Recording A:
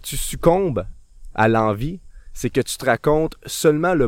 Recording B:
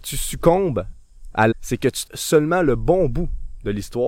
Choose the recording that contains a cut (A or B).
B